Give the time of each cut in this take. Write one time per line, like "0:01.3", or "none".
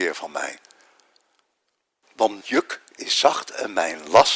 0:02.4